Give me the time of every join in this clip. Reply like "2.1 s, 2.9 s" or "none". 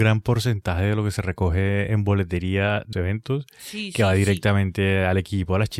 2.9 s